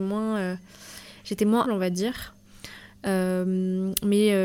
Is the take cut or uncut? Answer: cut